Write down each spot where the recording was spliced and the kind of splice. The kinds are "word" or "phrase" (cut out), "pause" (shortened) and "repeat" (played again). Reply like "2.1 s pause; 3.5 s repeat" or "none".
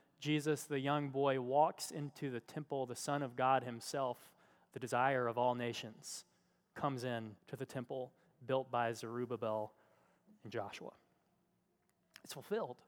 7.4 s pause

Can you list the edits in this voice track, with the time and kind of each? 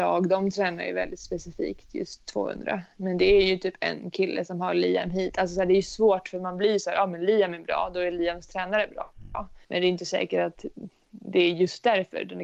9.6 s pause

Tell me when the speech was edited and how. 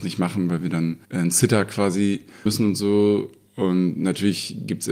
1.0 s pause; 2.5 s word

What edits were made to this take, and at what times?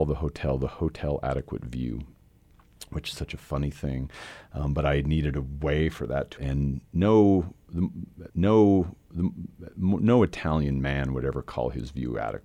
3.1 s word; 6.4 s word; 8.3 s repeat

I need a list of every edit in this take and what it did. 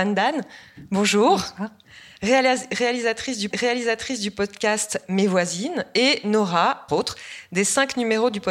3.5 s repeat; 6.9 s phrase

